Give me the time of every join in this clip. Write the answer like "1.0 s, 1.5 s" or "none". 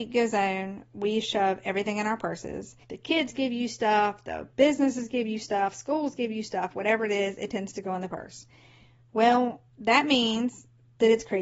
2.8 s, 4.5 s, 9.7 s